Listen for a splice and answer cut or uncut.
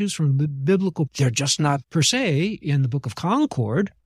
cut